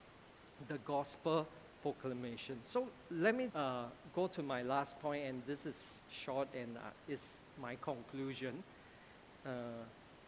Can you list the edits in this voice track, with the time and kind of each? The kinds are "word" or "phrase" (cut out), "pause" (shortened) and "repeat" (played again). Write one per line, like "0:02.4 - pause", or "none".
0:03.5 - word